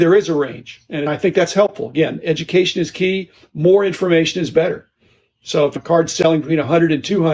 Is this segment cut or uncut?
uncut